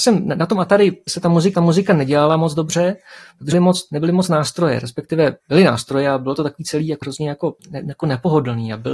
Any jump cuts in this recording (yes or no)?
yes